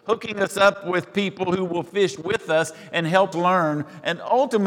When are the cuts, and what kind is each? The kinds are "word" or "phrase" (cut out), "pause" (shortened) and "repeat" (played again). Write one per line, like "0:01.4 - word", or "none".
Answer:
0:03.3 - word

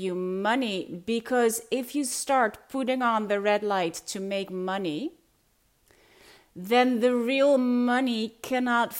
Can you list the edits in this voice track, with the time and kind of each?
none

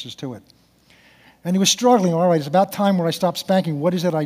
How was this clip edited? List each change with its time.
none

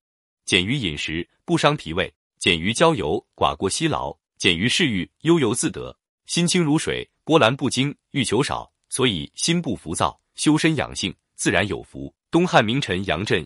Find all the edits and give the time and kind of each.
0:02.1 - pause
0:04.3 - pause
0:06.1 - pause
0:12.2 - pause

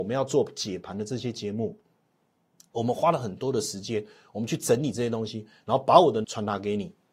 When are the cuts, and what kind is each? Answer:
0:06.2 - phrase

